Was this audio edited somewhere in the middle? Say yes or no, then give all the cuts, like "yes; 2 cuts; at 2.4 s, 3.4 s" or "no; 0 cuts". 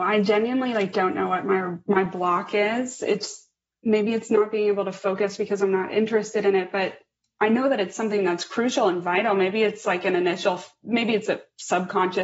no; 0 cuts